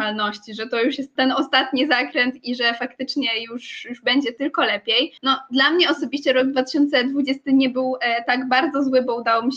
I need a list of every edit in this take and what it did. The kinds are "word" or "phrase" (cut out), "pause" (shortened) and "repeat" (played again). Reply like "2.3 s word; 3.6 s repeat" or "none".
1.2 s word; 5.2 s pause